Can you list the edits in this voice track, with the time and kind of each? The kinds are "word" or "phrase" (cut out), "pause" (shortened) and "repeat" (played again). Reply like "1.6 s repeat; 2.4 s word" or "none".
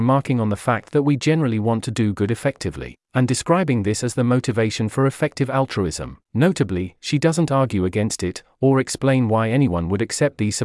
6.2 s pause